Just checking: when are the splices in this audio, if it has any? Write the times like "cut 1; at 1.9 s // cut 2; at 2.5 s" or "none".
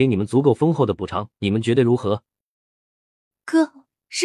cut 1; at 1.4 s